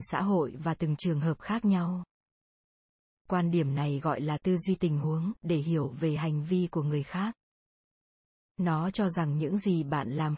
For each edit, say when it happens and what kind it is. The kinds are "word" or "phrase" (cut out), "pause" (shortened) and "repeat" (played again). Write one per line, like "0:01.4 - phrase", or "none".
none